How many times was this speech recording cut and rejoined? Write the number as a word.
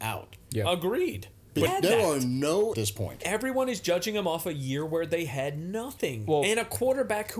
two